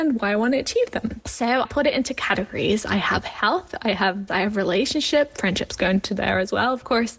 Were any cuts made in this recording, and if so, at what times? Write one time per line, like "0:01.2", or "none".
0:01.6
0:04.3